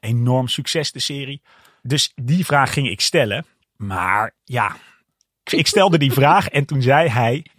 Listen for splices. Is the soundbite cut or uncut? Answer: uncut